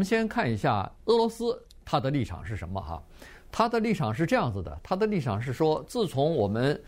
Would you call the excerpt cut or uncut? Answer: cut